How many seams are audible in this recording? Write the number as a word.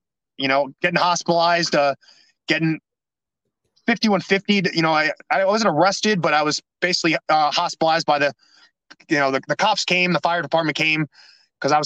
zero